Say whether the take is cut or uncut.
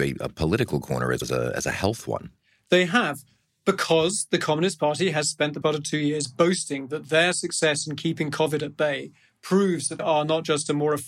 cut